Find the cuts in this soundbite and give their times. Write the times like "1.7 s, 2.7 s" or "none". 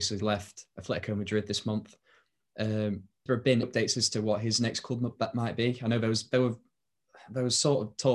3.3 s, 3.6 s